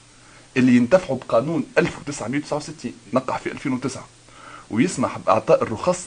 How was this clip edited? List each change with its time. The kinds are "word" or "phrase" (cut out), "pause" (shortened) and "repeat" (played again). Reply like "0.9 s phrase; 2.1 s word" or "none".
3.1 s word